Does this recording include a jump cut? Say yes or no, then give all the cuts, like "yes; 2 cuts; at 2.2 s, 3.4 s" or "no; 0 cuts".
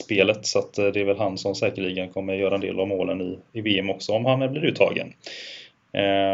no; 0 cuts